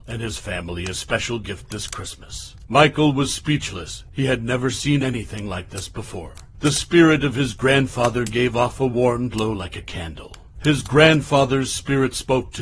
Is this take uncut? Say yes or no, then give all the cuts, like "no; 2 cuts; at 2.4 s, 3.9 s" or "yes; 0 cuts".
yes; 0 cuts